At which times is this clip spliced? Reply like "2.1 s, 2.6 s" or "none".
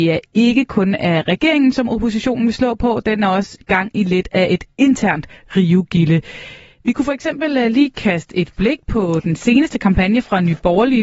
none